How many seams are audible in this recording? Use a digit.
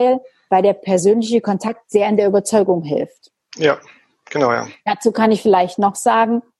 0